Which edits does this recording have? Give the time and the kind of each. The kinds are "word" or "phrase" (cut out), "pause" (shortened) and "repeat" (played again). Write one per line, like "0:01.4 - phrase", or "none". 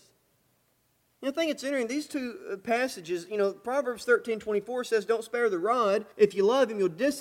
0:06.1 - pause